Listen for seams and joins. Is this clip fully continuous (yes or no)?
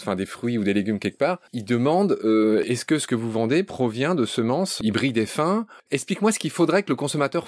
no